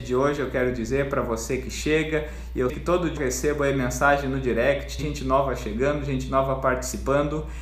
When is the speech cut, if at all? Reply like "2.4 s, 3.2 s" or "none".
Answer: 2.7 s, 3.2 s, 5.0 s